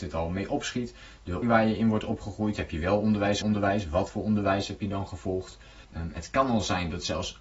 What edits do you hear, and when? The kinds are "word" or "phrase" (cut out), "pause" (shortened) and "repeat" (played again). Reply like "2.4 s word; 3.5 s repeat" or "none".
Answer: 1.4 s word; 3.4 s word; 5.8 s pause